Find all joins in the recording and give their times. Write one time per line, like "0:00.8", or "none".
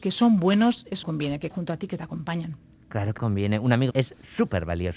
0:01.0
0:01.5
0:03.2
0:03.9

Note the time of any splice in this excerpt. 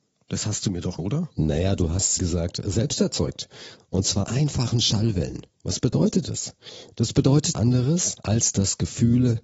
0:01.0
0:02.2
0:04.2
0:05.5
0:07.5
0:08.2

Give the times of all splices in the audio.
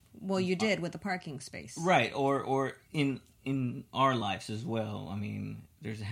none

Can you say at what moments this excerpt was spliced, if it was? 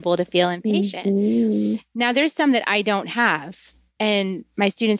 none

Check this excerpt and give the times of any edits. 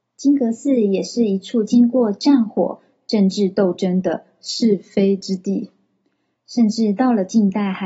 none

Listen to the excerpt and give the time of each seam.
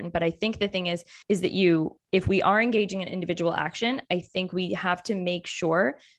0:01.2
0:02.0

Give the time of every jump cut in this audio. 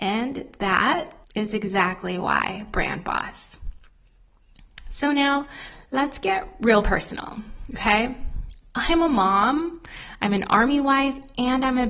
0:01.2

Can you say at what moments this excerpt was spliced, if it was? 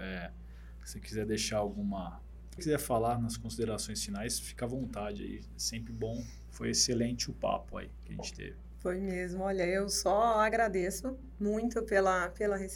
0:02.6

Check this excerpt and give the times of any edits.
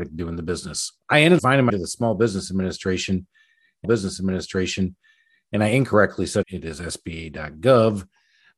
0:01.0
0:01.4
0:01.7
0:03.8
0:06.4

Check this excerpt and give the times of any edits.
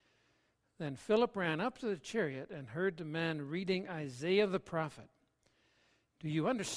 none

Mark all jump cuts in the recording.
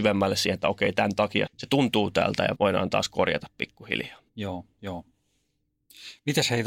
0:01.5
0:02.5
0:04.3

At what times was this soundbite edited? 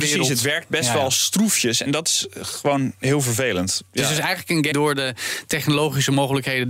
0:04.7

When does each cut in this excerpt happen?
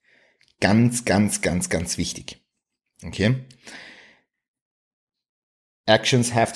none

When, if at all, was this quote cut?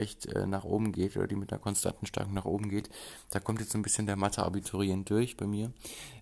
none

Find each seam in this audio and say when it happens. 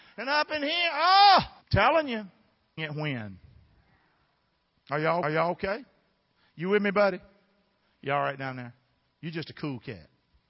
0:01.6
0:02.8
0:05.2

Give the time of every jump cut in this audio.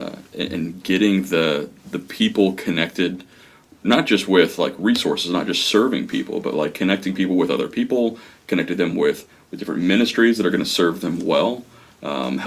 none

